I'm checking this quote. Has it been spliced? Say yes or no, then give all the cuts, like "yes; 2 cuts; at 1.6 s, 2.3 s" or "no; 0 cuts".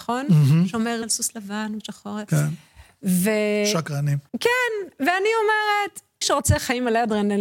yes; 4 cuts; at 1.0 s, 1.8 s, 4.3 s, 6.2 s